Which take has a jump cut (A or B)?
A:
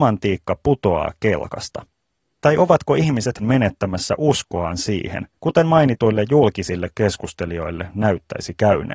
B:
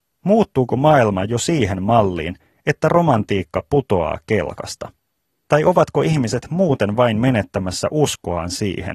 A